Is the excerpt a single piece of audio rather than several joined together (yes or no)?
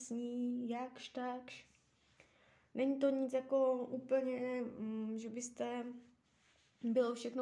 yes